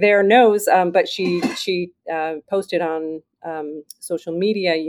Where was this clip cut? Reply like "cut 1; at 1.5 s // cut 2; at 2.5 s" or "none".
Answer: none